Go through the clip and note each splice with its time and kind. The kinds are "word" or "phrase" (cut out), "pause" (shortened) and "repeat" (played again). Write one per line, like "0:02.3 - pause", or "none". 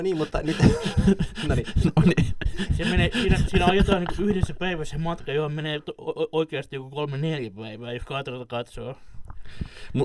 none